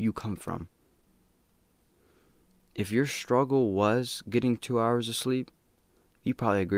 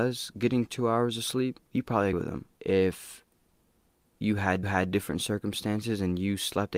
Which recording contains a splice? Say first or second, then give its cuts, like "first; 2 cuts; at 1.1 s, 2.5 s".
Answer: second; 4 cuts; at 1.7 s, 2.1 s, 2.5 s, 4.6 s